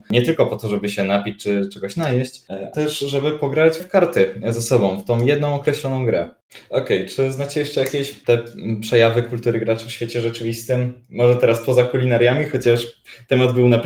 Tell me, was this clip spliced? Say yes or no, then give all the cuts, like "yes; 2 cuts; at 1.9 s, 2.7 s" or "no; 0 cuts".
yes; 2 cuts; at 2.7 s, 3.8 s